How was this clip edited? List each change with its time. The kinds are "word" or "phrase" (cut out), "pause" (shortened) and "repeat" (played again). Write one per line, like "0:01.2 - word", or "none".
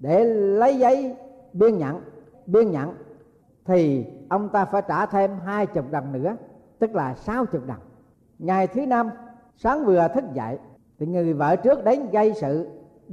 0:02.3 - repeat